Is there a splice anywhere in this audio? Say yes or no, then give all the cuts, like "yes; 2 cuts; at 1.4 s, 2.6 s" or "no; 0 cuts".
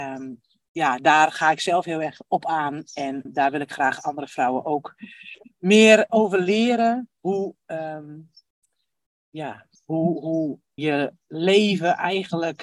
yes; 4 cuts; at 3.3 s, 6.1 s, 9.8 s, 10.8 s